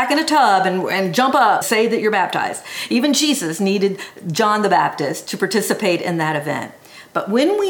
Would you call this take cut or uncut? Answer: cut